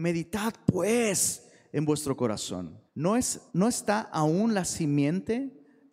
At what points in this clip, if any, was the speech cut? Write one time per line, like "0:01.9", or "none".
0:02.9
0:03.5